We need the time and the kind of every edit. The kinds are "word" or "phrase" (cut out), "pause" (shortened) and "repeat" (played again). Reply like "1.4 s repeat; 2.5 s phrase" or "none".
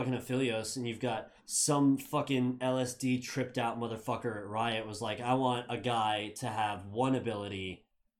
1.4 s pause